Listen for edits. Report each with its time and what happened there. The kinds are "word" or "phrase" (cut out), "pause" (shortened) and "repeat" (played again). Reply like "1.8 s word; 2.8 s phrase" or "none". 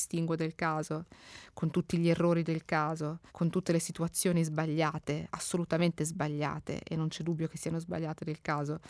3.3 s pause